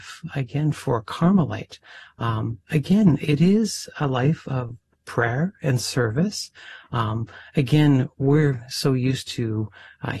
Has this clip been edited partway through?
no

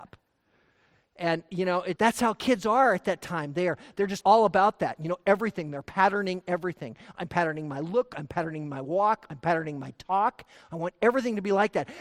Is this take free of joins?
no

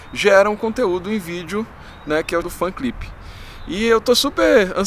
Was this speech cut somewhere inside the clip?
yes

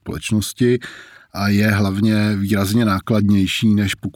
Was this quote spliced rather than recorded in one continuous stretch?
no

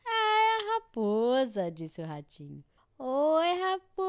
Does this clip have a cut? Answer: yes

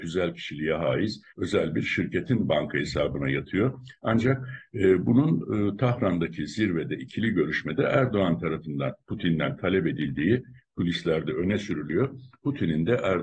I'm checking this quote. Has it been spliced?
yes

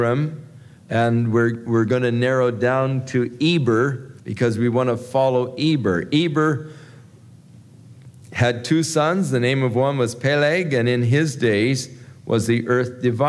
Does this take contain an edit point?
yes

